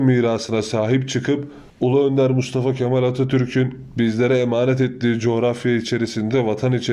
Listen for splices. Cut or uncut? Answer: cut